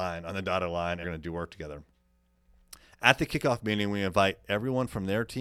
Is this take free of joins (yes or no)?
no